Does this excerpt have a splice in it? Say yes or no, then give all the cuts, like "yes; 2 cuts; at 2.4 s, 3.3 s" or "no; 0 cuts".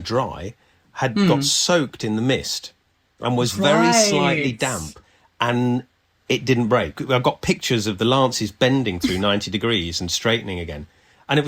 no; 0 cuts